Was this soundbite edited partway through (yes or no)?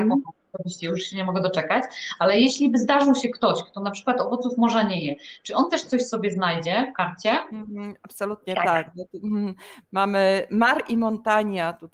no